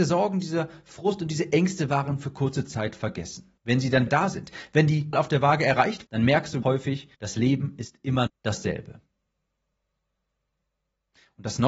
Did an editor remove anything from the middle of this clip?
yes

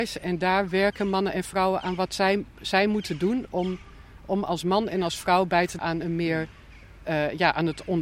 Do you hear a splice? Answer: yes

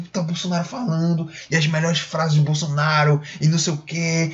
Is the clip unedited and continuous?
yes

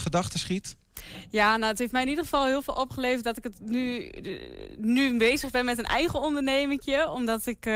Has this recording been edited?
no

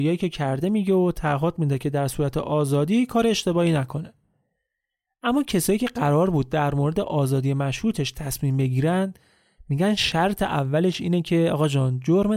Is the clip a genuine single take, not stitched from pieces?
yes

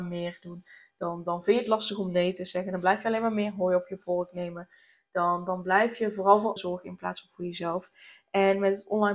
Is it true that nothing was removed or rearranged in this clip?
no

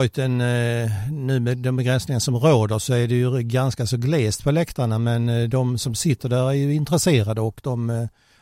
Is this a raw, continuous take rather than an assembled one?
yes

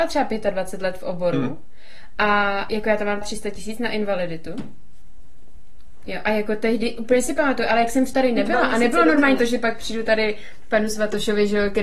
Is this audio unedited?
no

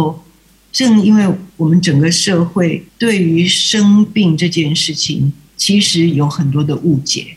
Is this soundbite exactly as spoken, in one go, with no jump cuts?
no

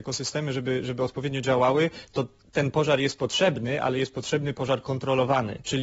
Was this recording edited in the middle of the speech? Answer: no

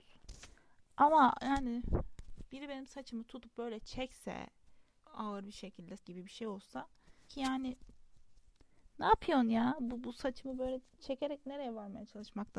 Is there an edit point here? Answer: yes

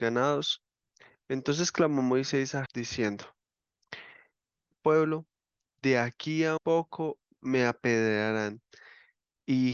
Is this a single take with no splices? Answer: no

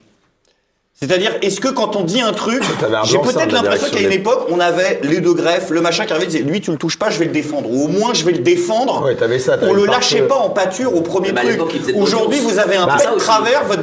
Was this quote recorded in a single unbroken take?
yes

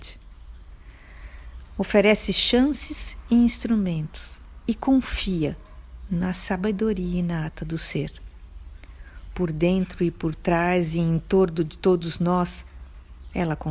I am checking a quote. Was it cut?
no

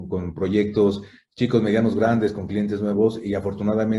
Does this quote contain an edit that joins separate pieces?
no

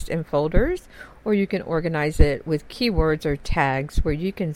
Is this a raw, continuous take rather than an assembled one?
yes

